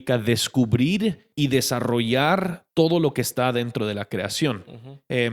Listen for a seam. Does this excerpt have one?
yes; 1 cut; at 1.3 s

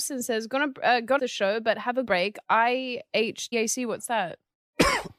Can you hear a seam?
yes; 3 cuts; at 1.2 s, 2.1 s, 3.5 s

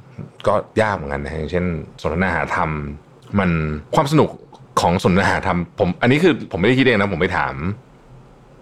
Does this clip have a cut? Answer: yes; 1 cut; at 3.9 s

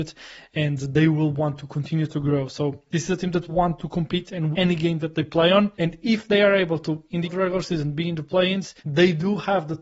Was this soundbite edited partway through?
yes; 5 cuts; at 3.5 s, 4.5 s, 5.7 s, 7.2 s, 8.8 s

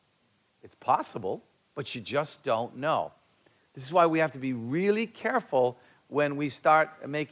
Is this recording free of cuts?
yes; 0 cuts

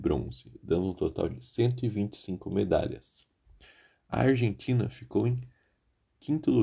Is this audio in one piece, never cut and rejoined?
yes; 0 cuts

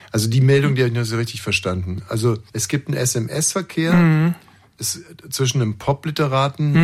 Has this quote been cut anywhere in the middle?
yes; 1 cut; at 2.5 s

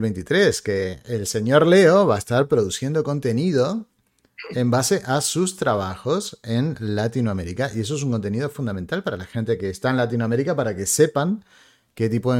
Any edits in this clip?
no; 0 cuts

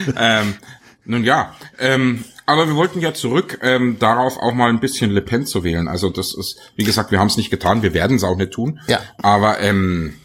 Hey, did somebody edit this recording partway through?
no; 0 cuts

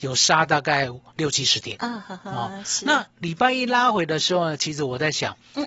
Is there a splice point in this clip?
yes; 1 cut; at 3.1 s

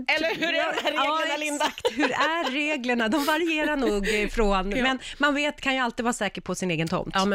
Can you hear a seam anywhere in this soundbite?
no; 0 cuts

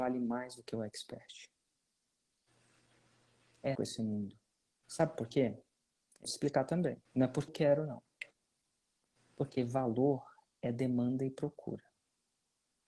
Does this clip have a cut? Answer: yes; 5 cuts; at 3.7 s, 4.6 s, 6.2 s, 7.0 s, 7.5 s

